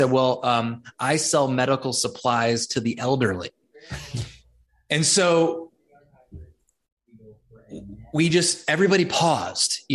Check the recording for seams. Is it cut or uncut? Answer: uncut